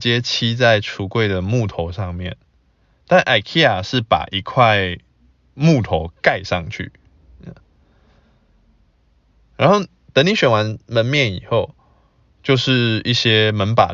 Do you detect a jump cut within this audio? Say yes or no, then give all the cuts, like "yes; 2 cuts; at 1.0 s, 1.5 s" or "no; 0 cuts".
no; 0 cuts